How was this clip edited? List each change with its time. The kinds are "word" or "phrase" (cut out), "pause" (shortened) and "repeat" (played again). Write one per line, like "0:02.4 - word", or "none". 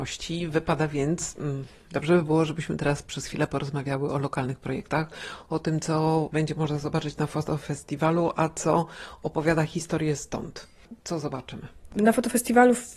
none